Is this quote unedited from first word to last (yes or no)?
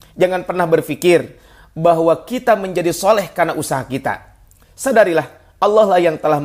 yes